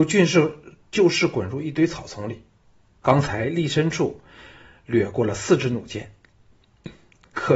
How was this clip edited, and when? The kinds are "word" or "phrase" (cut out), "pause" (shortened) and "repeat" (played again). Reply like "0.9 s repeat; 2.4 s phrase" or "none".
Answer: none